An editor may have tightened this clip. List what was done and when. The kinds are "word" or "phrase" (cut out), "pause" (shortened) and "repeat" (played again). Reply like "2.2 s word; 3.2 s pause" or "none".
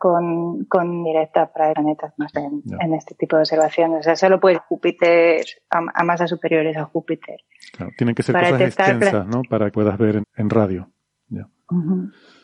1.0 s word; 1.7 s word; 2.3 s word; 4.5 s word; 9.7 s word; 10.2 s word